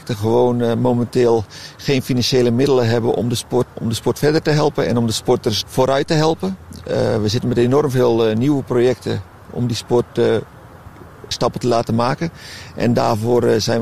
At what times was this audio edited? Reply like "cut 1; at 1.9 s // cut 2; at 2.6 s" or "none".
cut 1; at 3.7 s // cut 2; at 5.6 s // cut 3; at 11.3 s